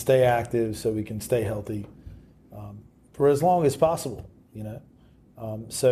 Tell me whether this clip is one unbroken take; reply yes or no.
yes